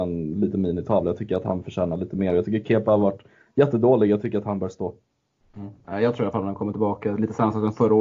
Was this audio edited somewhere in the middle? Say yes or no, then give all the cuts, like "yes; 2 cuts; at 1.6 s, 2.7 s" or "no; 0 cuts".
no; 0 cuts